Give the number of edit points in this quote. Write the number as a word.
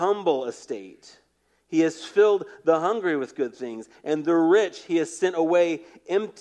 one